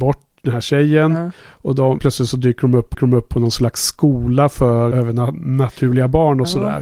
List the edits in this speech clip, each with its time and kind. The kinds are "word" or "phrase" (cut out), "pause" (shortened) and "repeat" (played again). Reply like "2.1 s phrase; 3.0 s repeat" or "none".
1.4 s pause; 2.0 s word; 2.9 s repeat; 4.9 s word